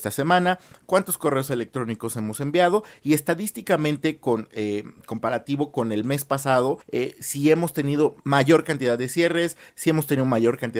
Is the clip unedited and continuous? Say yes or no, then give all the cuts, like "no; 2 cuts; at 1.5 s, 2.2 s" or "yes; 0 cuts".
no; 2 cuts; at 6.8 s, 8.2 s